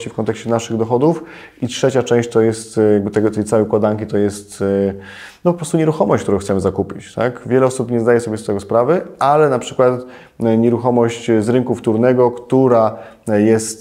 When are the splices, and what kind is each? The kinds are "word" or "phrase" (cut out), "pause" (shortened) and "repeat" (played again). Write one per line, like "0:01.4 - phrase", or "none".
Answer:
none